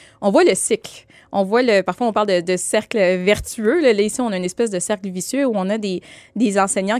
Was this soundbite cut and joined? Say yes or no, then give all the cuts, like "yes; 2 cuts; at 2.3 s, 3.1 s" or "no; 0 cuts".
no; 0 cuts